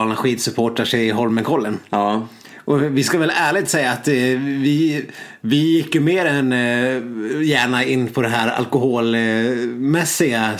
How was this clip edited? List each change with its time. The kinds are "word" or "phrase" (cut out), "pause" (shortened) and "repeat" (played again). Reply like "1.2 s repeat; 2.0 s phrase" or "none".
none

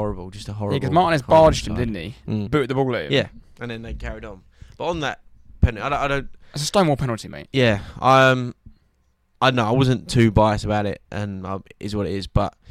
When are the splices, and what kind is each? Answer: 2.5 s word

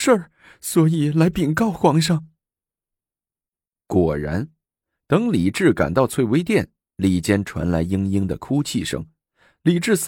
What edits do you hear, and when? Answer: none

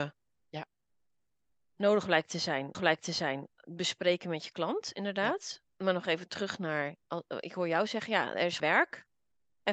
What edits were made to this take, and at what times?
2.7 s repeat; 7.0 s pause; 8.6 s phrase

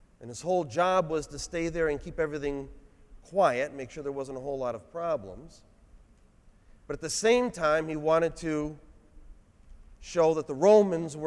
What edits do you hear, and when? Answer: none

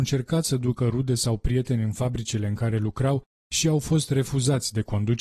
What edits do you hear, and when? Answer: none

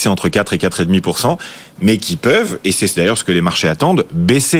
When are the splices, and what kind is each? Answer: none

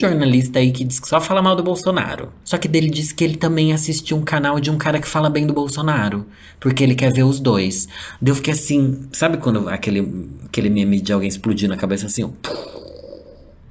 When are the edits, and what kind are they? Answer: none

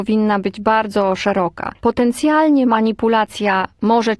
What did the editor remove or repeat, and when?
1.8 s pause

